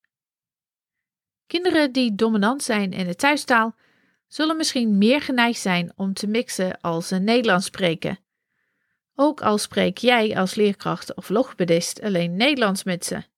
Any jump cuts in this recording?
no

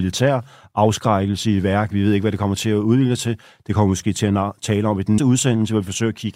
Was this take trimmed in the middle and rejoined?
yes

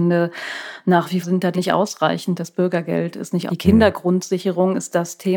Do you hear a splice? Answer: yes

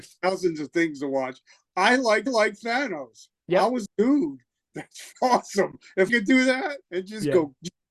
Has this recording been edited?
yes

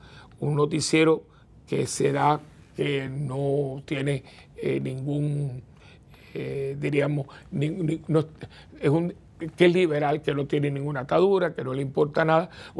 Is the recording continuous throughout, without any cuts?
yes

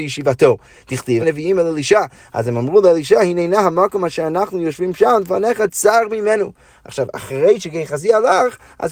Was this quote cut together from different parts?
yes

